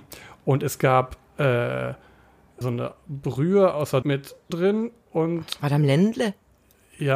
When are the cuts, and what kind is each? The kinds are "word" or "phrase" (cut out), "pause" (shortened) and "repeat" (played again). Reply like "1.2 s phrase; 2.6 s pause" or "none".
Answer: 2.6 s word; 4.0 s word; 4.5 s word